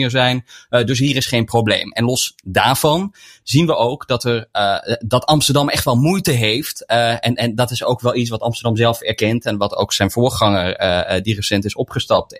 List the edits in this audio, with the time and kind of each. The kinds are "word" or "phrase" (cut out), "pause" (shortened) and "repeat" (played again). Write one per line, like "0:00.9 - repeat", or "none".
none